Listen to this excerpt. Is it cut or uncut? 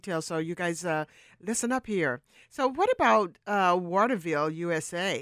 uncut